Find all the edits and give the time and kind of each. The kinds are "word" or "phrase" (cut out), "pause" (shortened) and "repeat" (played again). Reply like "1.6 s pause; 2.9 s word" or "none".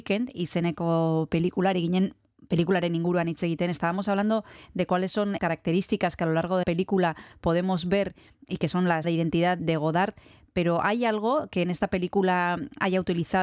5.4 s word; 6.6 s word; 9.0 s word; 9.6 s word